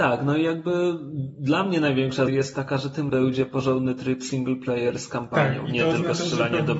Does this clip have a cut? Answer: yes; 2 cuts; at 2.3 s, 3.1 s

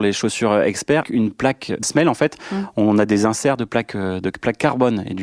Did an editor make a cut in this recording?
yes; 2 cuts; at 1.0 s, 1.8 s

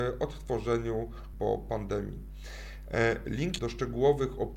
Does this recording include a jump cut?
yes; 2 cuts; at 1.3 s, 3.6 s

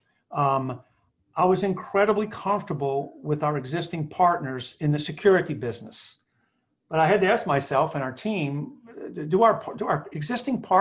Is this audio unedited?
yes; 0 cuts

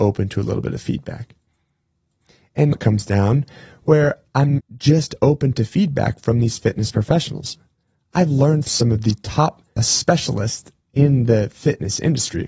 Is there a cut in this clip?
yes; 4 cuts; at 2.7 s, 4.6 s, 8.7 s, 9.8 s

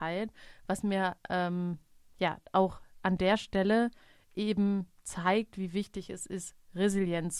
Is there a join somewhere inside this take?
no; 0 cuts

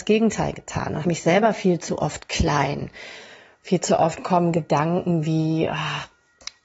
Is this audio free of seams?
no; 1 cut; at 1.0 s

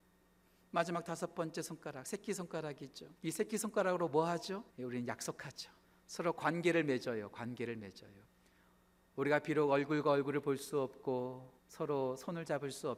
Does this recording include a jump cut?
yes; 5 cuts; at 3.2 s, 4.7 s, 5.8 s, 8.2 s, 11.6 s

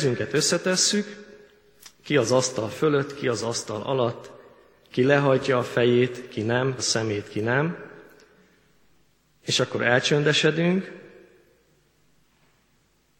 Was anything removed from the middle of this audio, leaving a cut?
yes; 1 cut; at 6.8 s

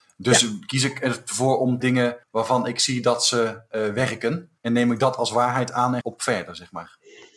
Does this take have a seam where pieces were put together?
yes; 4 cuts; at 1.8 s, 2.2 s, 4.6 s, 6.0 s

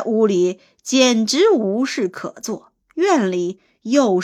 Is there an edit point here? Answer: yes; 1 cut; at 2.8 s

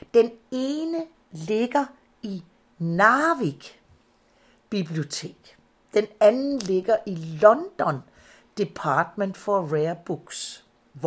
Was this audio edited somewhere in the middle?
no; 0 cuts

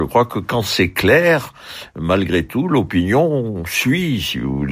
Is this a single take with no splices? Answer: yes; 0 cuts

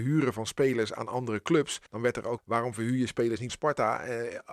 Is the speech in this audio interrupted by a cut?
yes; 3 cuts; at 1.9 s, 2.4 s, 3.5 s

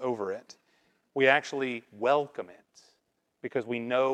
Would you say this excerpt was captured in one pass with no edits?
yes; 0 cuts

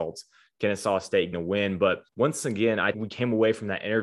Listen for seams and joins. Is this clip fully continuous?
no; 3 cuts; at 1.3 s, 2.1 s, 2.9 s

